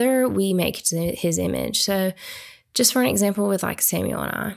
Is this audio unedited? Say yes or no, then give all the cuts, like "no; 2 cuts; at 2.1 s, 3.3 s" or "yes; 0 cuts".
yes; 0 cuts